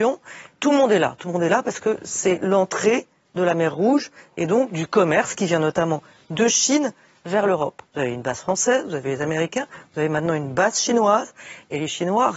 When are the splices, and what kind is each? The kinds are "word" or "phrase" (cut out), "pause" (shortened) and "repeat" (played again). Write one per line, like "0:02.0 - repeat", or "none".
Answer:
0:07.9 - pause